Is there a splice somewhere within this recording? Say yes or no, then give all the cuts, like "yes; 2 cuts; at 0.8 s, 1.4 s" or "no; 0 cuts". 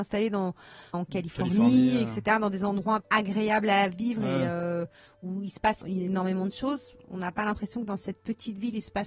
yes; 3 cuts; at 0.9 s, 3.0 s, 5.8 s